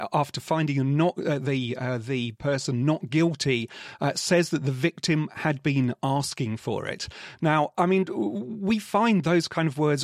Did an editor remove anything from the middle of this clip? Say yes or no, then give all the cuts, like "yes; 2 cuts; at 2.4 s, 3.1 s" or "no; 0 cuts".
no; 0 cuts